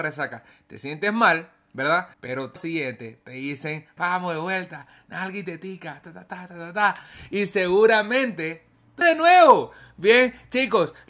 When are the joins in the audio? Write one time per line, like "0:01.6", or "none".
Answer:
0:02.1
0:02.6
0:04.0
0:06.0
0:09.0